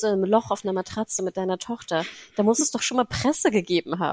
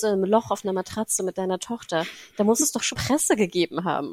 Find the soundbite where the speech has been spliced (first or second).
second